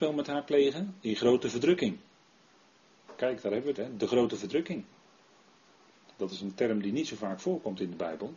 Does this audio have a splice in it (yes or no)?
yes